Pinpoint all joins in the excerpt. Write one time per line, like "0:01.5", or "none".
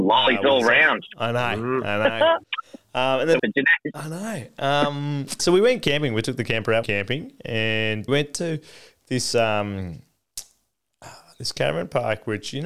0:02.4
0:03.4
0:05.4
0:06.8
0:08.1